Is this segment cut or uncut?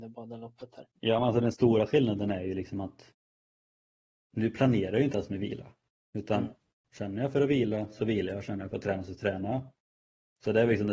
cut